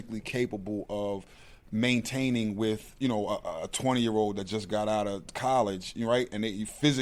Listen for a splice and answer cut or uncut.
uncut